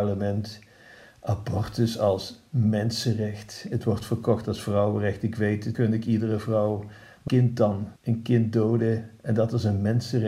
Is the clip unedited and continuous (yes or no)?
no